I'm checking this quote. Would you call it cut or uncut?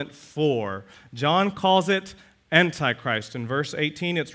uncut